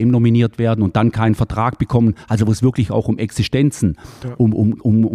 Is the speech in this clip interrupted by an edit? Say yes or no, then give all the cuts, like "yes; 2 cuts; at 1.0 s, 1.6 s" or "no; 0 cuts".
no; 0 cuts